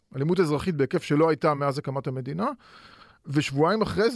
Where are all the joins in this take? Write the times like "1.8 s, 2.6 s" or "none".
none

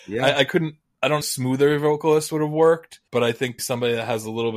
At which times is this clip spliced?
1.2 s, 3.1 s, 3.6 s

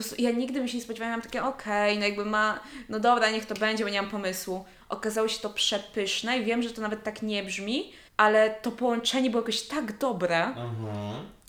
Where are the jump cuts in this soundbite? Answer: 8.1 s

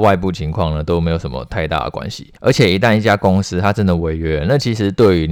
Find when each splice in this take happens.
2.4 s

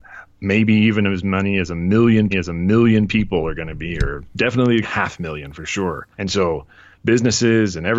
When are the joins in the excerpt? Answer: 2.3 s, 4.8 s, 6.1 s

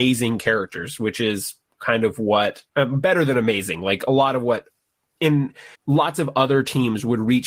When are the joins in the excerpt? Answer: 2.7 s, 5.7 s

